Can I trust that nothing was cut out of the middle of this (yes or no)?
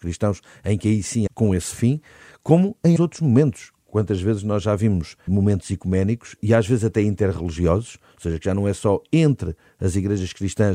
no